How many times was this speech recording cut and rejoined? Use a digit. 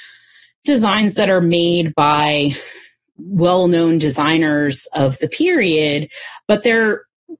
0